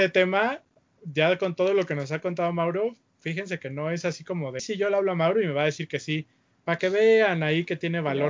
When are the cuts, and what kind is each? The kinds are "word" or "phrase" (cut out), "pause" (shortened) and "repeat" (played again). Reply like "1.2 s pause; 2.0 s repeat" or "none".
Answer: 4.6 s word